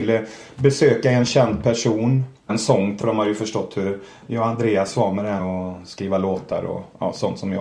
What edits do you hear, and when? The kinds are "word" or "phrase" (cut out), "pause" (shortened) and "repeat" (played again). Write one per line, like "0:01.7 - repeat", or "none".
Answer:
0:02.5 - word
0:03.0 - word
0:05.4 - word